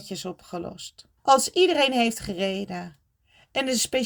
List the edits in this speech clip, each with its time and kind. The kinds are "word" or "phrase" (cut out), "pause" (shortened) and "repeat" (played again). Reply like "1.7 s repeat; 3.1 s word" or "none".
1.2 s pause